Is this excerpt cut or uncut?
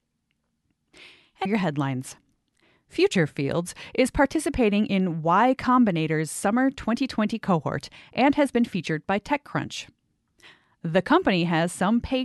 cut